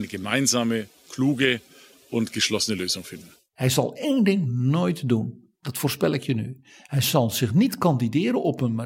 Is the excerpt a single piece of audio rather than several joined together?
yes; 0 cuts

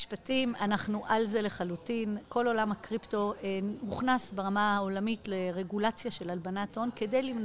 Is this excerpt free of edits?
yes; 0 cuts

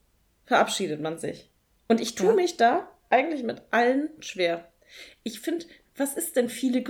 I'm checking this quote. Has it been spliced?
no; 0 cuts

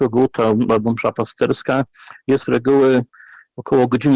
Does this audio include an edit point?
yes; 1 cut; at 2.4 s

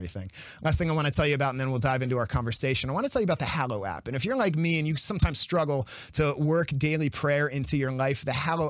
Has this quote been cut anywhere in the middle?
no; 0 cuts

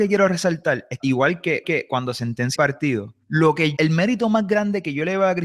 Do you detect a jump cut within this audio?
yes; 5 cuts; at 1.0 s, 1.6 s, 2.5 s, 3.2 s, 3.8 s

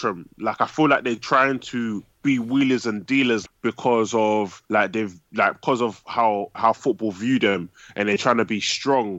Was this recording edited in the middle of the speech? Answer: yes; 3 cuts; at 3.5 s, 4.7 s, 6.5 s

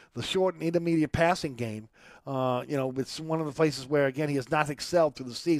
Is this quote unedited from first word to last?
yes; 0 cuts

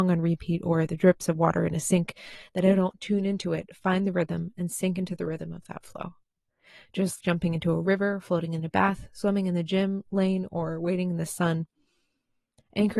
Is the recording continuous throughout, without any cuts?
no; 1 cut; at 7.2 s

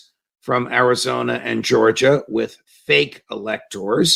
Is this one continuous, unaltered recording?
yes; 0 cuts

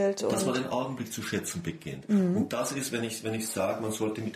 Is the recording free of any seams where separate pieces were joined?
yes; 0 cuts

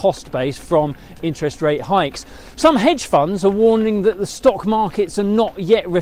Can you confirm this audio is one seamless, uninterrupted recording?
yes; 0 cuts

